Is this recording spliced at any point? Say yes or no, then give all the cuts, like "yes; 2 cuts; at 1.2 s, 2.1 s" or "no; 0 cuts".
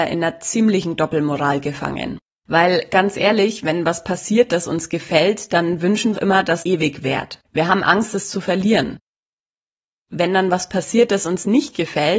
yes; 4 cuts; at 2.2 s, 6.1 s, 6.6 s, 7.4 s